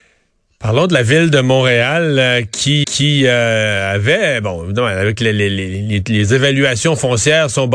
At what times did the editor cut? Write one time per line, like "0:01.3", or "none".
0:02.8

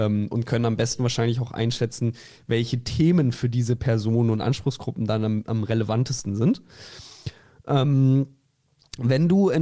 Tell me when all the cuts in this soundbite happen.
none

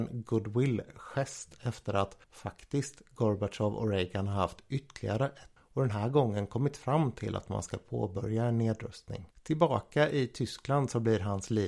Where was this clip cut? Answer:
0:02.2
0:05.6

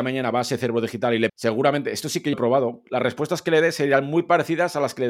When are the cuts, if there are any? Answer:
0:01.3
0:02.3

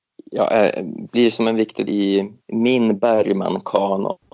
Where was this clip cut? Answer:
0:01.9
0:02.4

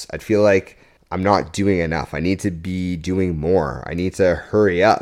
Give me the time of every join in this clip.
0:01.0

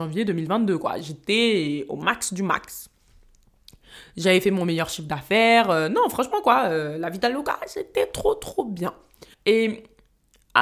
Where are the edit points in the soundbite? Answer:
0:09.3

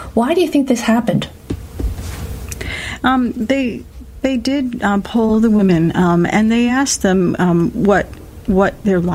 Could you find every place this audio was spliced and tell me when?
none

